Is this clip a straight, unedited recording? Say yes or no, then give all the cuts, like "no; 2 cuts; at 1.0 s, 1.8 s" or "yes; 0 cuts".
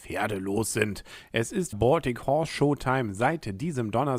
no; 1 cut; at 1.7 s